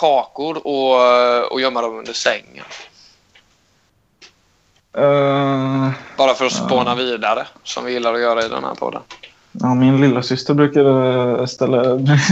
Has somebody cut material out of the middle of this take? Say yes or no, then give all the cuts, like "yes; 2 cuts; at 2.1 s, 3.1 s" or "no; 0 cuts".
no; 0 cuts